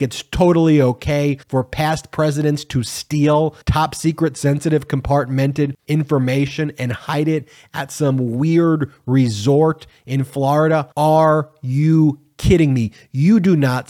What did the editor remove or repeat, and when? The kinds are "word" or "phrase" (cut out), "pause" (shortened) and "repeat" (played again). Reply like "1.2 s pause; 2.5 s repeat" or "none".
1.4 s pause; 3.6 s pause; 5.8 s pause; 10.9 s pause

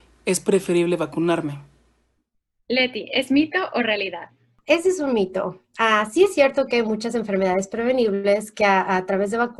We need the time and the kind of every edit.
none

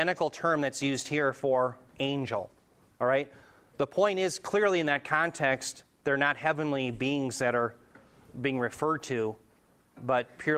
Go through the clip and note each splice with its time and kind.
none

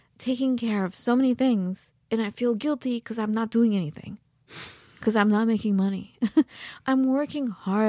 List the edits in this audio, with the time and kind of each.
none

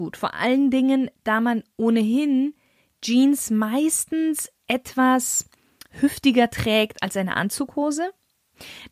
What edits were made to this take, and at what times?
none

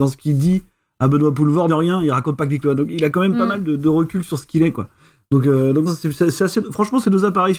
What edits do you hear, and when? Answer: 1.7 s word; 2.6 s word; 5.9 s word

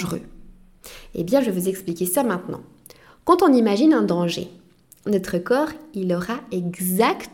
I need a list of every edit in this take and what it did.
none

